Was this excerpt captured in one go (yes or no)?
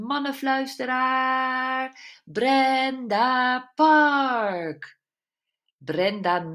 yes